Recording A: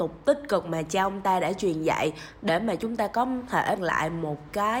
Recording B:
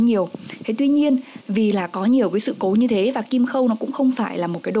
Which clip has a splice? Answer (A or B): A